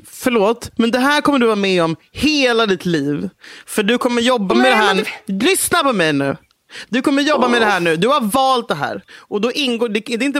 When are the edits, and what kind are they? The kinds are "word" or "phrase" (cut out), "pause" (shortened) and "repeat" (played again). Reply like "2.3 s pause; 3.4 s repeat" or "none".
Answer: none